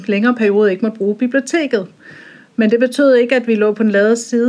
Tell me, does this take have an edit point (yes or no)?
no